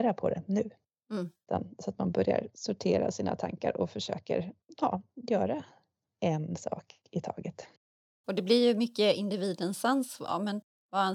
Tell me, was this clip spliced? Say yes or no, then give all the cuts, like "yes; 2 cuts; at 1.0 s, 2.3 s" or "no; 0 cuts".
no; 0 cuts